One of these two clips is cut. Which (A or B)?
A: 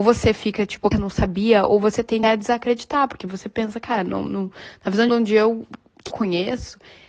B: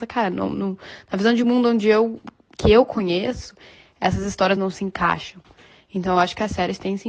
A